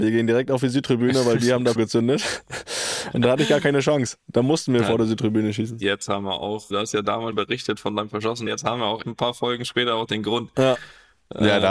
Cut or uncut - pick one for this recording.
cut